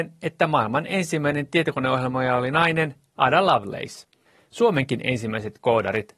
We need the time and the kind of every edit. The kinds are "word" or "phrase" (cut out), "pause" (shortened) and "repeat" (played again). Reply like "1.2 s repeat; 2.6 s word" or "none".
none